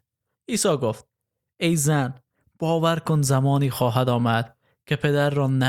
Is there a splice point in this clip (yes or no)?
no